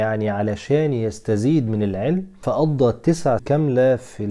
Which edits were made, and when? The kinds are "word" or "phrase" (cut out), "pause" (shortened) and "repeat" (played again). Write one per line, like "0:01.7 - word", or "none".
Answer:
0:03.4 - word